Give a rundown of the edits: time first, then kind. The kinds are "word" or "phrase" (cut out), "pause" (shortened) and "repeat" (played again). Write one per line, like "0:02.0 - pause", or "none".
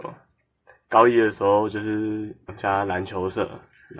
0:02.5 - word

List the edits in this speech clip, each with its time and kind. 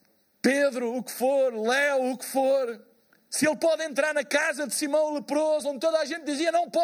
0:03.2 - pause

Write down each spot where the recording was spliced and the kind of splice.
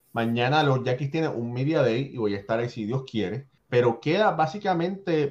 0:03.6 - pause

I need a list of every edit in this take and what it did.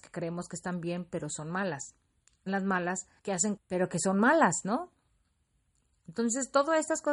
0:02.5 - phrase
0:03.2 - pause
0:03.6 - phrase

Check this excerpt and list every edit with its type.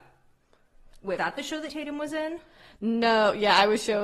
0:01.2 - word
0:01.7 - word

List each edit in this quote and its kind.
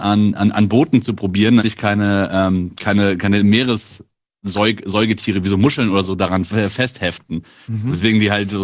0:01.6 - word

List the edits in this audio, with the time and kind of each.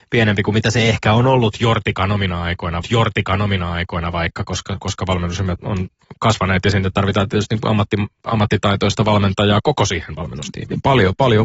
0:02.8 - repeat
0:05.6 - word

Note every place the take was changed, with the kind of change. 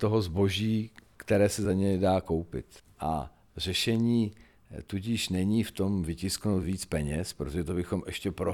none

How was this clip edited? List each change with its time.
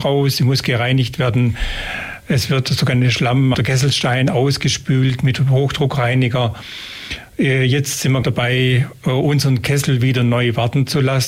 0:03.5 - word
0:08.2 - word

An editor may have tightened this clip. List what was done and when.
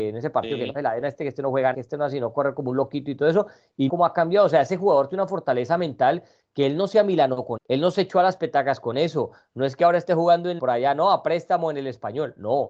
0:01.7 - word
0:03.9 - word
0:07.6 - word
0:10.6 - word

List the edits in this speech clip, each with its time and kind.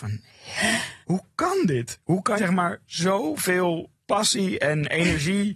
0:01.0 - pause
0:02.4 - word

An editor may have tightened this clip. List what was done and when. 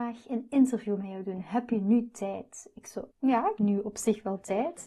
0:03.1 - word
0:03.6 - word

